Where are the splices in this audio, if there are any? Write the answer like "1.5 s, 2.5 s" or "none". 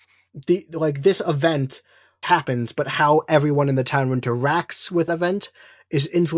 2.2 s, 5.1 s